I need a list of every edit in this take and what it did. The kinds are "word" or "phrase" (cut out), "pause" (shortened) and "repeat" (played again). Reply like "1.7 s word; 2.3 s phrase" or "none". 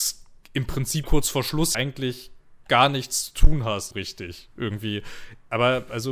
1.0 s word; 1.7 s word; 3.9 s word